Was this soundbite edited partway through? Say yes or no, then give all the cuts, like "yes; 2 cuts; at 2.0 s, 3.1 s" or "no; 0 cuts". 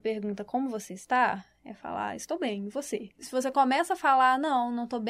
no; 0 cuts